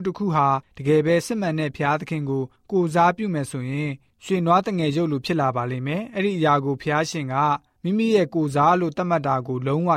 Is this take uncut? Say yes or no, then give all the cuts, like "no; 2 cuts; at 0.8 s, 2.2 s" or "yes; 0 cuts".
yes; 0 cuts